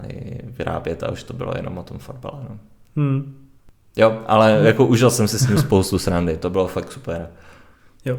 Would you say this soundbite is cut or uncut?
uncut